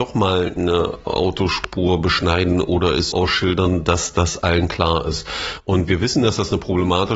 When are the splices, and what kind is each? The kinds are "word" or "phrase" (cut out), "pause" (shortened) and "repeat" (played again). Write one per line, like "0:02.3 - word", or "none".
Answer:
0:03.1 - word

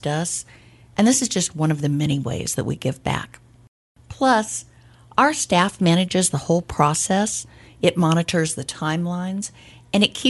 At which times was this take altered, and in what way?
none

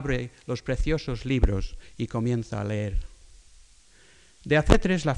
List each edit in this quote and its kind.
none

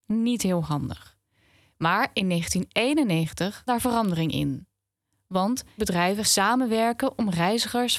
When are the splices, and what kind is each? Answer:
0:03.7 - word
0:05.8 - word
0:06.2 - word

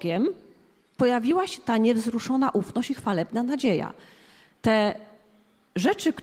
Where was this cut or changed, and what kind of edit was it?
none

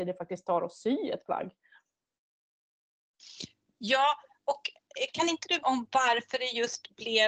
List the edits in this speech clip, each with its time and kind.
0:05.6 - phrase

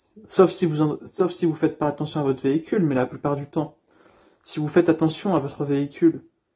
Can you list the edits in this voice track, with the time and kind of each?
none

